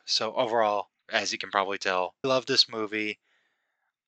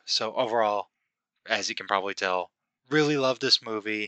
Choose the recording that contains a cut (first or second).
first